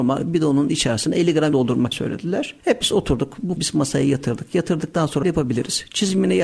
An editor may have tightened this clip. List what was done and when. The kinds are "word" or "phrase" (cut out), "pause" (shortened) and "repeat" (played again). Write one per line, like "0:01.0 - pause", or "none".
0:01.5 - word
0:01.9 - word
0:02.8 - word
0:03.6 - word
0:05.2 - word